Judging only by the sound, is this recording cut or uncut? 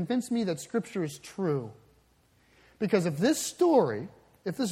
uncut